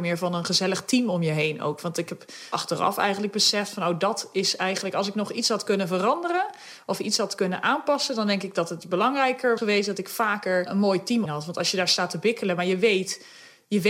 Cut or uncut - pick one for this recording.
cut